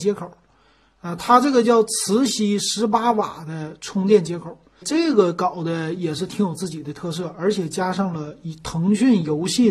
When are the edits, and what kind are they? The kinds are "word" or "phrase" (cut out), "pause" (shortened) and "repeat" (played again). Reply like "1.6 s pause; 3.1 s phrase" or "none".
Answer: 4.8 s word